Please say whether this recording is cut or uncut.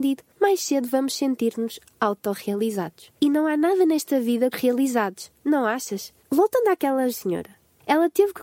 cut